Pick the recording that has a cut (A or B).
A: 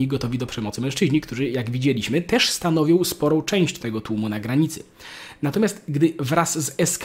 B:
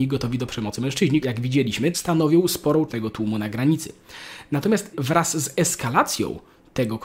B